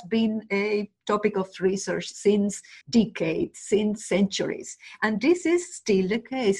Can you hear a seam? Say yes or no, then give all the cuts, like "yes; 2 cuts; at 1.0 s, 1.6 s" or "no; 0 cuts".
yes; 1 cut; at 2.8 s